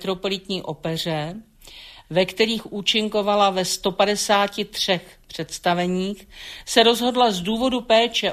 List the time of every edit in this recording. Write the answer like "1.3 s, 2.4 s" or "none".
none